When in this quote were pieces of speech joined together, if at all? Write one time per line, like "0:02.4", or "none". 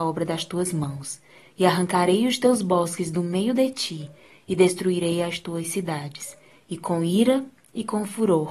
none